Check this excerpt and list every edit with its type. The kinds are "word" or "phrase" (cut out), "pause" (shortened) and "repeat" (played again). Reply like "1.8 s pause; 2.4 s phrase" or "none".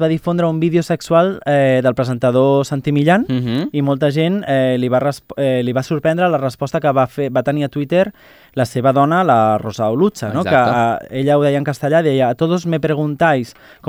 none